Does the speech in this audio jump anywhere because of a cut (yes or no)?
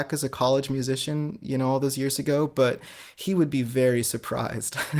no